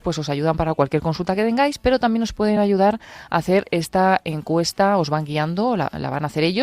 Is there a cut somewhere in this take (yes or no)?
no